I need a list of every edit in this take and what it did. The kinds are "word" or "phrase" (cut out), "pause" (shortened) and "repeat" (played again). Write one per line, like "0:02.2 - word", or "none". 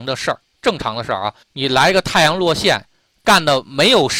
0:01.4 - pause